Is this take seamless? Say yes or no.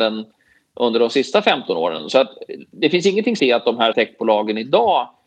no